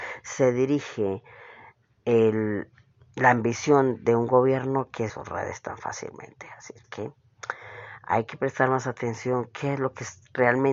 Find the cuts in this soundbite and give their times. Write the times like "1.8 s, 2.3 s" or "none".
5.1 s, 6.8 s